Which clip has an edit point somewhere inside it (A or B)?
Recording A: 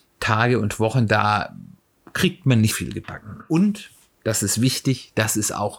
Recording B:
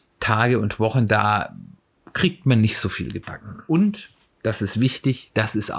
A